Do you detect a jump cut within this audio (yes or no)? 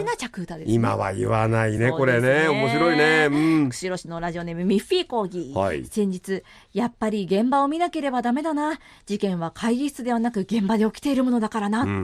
no